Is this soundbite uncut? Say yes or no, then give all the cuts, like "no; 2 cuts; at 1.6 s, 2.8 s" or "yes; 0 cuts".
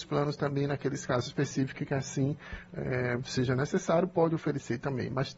yes; 0 cuts